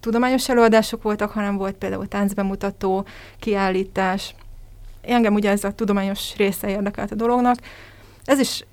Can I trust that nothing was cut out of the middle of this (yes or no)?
yes